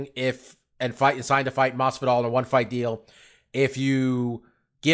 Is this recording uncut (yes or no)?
yes